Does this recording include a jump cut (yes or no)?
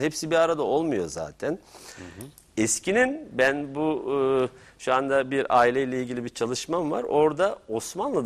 no